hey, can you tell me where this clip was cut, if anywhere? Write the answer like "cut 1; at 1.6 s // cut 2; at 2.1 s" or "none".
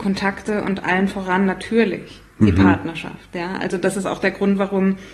cut 1; at 2.3 s